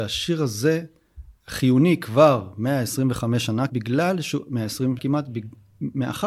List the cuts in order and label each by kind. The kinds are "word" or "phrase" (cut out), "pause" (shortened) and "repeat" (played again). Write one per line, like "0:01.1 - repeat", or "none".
0:01.4 - pause
0:03.7 - word
0:05.0 - word

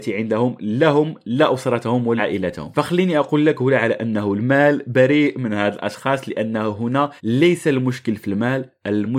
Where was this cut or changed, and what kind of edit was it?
0:02.2 - word
0:07.2 - pause

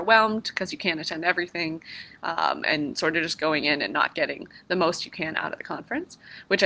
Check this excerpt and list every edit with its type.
none

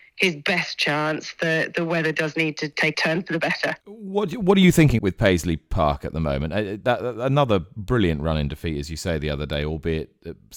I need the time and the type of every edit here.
0:02.9 - phrase
0:03.8 - pause
0:05.0 - word

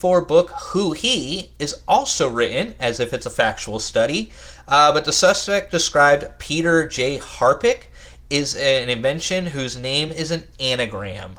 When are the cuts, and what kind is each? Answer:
none

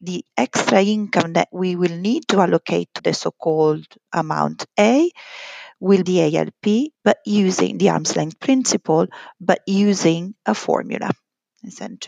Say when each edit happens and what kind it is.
0:03.0 - phrase
0:06.1 - phrase
0:07.0 - pause

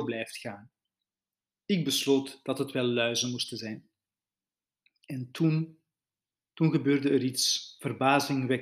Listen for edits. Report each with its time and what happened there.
none

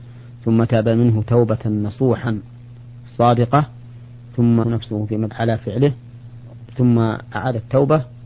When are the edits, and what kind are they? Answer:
0:04.6 - word
0:05.3 - word

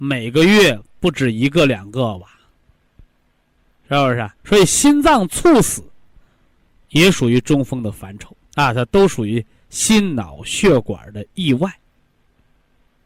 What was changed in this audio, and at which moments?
0:04.4 - pause
0:08.4 - pause

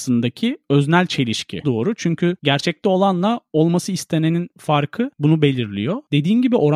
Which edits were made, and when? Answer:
0:01.6 - phrase

